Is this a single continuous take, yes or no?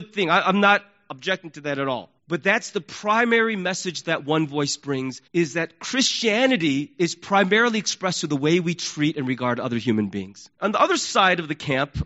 no